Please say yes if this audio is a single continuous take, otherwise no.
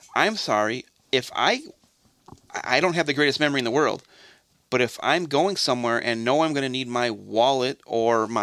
yes